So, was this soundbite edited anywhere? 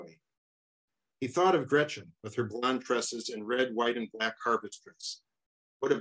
no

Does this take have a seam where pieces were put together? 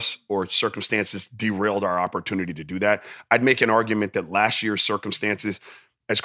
no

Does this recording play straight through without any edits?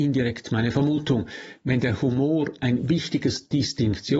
yes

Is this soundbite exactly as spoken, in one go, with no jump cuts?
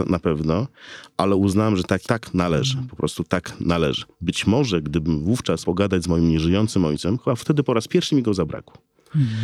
no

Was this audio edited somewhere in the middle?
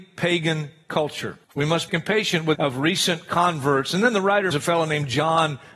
yes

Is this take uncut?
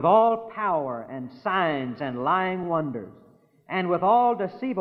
yes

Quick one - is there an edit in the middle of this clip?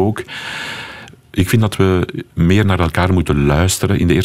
no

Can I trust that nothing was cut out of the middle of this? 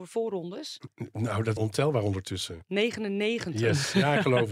no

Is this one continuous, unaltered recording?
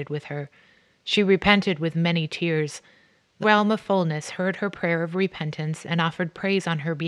no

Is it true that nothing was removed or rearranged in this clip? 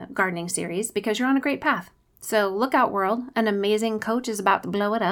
yes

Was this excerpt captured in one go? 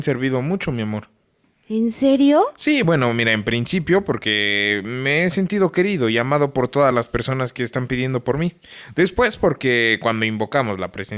yes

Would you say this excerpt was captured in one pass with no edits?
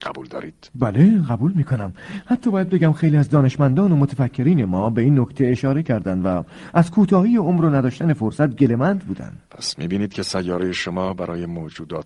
no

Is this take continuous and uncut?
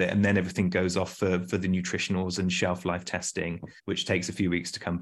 no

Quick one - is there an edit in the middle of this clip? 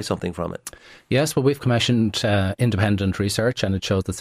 no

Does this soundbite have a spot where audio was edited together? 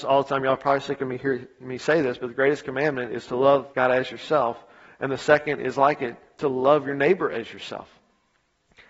yes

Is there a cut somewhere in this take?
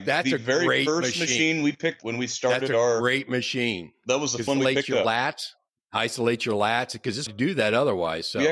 yes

